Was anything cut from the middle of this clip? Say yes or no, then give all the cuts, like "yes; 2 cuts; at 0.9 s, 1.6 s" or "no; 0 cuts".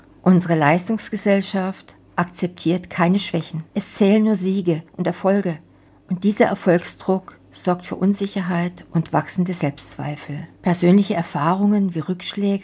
yes; 3 cuts; at 3.7 s, 5.9 s, 10.5 s